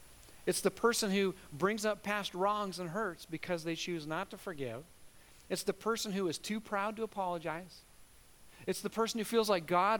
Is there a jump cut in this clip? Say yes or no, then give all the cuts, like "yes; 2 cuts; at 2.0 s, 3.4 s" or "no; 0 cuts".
no; 0 cuts